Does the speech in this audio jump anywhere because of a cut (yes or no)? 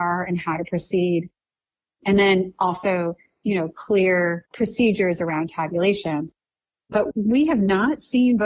no